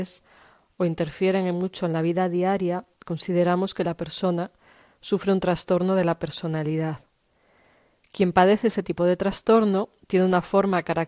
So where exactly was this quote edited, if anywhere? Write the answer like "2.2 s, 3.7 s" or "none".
none